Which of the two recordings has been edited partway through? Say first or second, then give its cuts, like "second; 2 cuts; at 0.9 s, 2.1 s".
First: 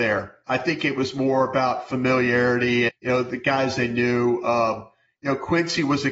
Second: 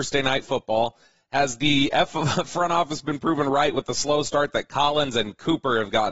first; 1 cut; at 2.9 s